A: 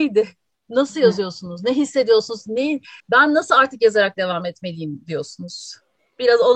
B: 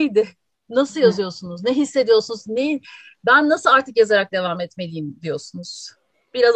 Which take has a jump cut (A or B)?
A